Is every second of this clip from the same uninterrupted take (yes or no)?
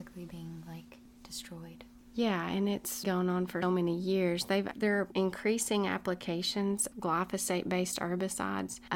no